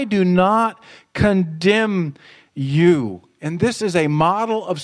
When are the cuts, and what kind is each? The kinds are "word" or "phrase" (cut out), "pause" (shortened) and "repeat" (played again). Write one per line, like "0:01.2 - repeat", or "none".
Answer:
none